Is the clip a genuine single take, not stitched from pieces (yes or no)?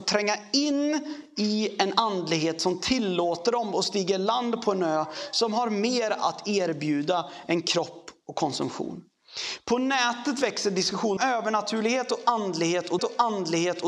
no